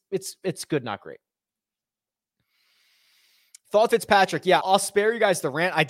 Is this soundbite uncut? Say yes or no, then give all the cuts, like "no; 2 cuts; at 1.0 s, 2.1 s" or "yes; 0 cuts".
no; 2 cuts; at 3.9 s, 4.6 s